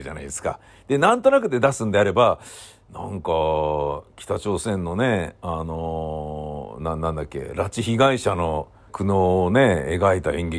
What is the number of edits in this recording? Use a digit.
1